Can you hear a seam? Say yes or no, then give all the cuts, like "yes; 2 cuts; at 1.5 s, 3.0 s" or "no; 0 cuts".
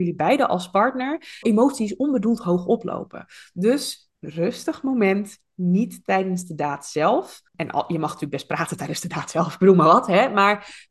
yes; 3 cuts; at 1.4 s, 4.1 s, 7.5 s